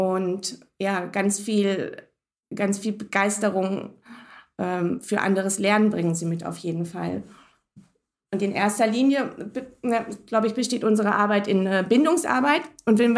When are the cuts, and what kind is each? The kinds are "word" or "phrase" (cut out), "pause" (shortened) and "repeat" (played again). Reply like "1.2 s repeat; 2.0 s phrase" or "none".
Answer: 5.0 s word